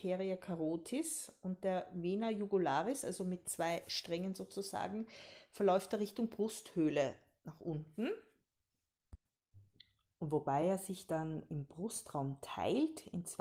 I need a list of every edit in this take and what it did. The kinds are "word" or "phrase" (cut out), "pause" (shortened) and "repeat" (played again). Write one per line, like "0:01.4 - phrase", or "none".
none